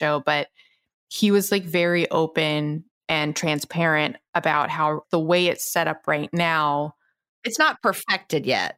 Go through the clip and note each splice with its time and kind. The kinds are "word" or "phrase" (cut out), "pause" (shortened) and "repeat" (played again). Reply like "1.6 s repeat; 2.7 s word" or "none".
none